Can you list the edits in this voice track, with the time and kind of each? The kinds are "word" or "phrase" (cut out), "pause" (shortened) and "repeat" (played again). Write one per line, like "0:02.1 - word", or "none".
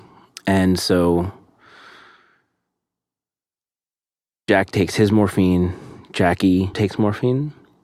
0:06.7 - word